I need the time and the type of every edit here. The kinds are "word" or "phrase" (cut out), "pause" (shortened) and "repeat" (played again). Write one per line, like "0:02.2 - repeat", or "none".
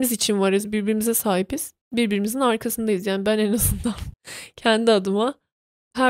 0:01.8 - pause
0:04.1 - pause